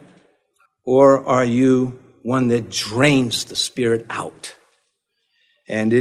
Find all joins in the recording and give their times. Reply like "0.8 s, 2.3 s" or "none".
none